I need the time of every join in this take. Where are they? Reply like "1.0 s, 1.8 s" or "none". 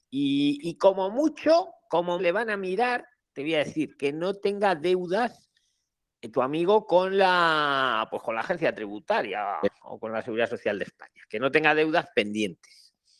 2.2 s